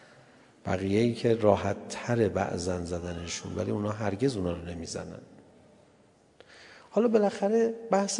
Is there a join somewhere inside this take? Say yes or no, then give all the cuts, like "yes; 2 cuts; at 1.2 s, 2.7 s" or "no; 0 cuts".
no; 0 cuts